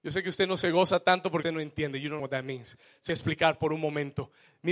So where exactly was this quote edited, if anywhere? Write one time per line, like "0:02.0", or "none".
0:01.4
0:02.2
0:03.1